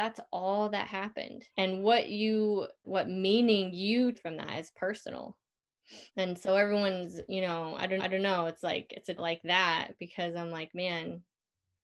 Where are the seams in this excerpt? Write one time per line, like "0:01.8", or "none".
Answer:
0:01.5
0:02.8
0:04.1
0:06.1
0:08.0
0:09.2